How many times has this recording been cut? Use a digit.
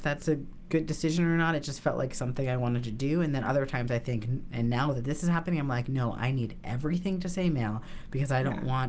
0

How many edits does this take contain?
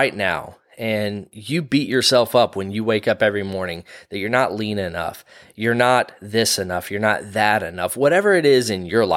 0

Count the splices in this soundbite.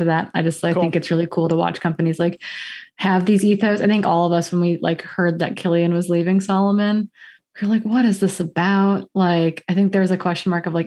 1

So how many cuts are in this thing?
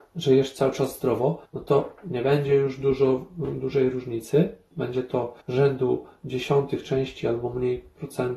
3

